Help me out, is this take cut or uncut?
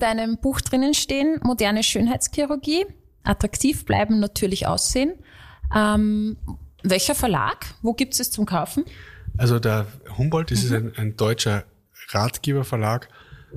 cut